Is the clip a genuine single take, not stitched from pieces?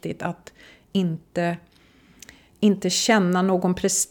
yes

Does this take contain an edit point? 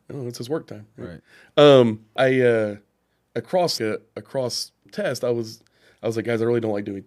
yes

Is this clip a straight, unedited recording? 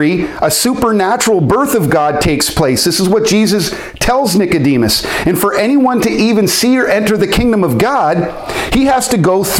yes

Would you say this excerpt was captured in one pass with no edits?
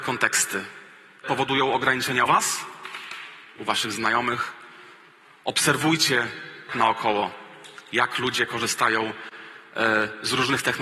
no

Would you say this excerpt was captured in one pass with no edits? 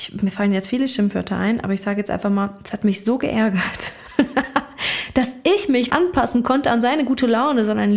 no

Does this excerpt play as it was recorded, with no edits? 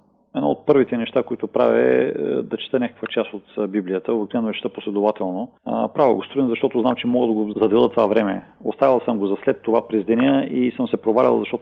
no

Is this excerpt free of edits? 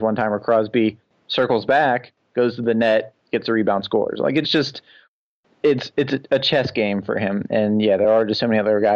yes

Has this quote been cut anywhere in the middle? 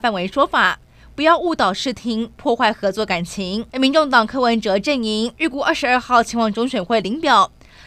yes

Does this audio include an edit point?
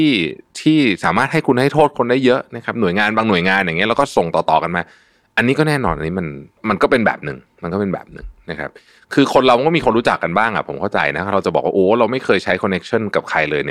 no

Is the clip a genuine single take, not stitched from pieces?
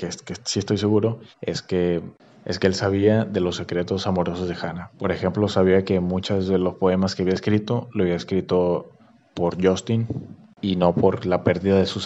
no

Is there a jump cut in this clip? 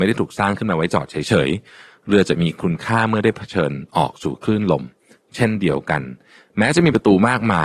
no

